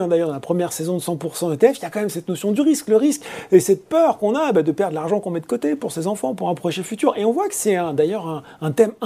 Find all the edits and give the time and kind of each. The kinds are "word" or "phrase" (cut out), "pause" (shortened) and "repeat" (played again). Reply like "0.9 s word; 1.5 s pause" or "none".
none